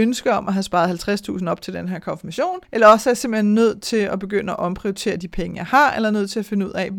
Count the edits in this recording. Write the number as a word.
one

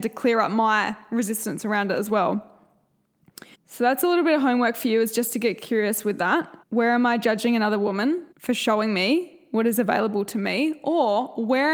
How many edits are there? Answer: three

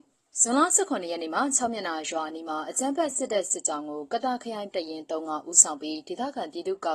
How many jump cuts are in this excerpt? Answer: one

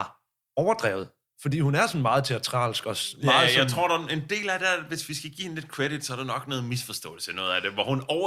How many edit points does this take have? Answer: zero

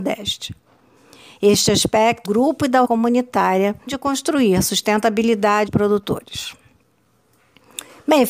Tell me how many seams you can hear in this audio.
four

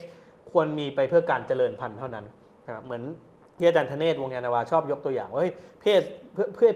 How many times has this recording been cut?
zero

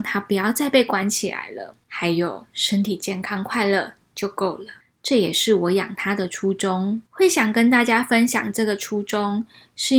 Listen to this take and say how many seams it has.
three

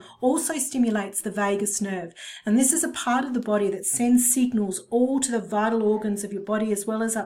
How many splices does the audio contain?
zero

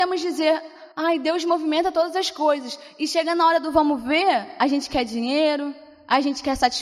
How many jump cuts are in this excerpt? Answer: one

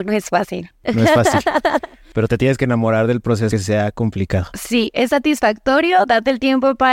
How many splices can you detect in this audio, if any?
two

